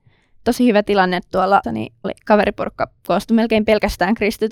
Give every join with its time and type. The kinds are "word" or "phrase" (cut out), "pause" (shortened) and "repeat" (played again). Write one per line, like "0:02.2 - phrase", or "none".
0:01.6 - word
0:02.0 - word